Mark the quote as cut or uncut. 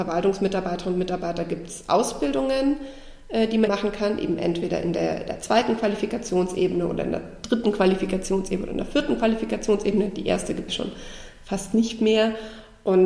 cut